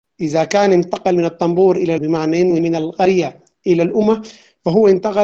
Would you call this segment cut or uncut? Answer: cut